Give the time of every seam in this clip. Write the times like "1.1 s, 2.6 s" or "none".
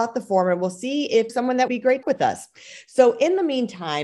1.3 s, 1.7 s, 2.0 s